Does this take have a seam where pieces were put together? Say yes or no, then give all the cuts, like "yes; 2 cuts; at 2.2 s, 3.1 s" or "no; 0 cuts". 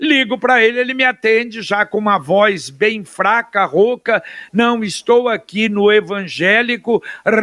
no; 0 cuts